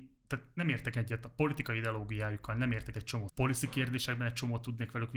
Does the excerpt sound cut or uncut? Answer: cut